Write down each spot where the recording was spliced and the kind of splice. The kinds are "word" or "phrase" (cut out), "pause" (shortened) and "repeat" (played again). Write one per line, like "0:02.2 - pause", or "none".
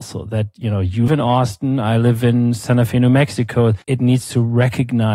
0:01.1 - word
0:03.8 - pause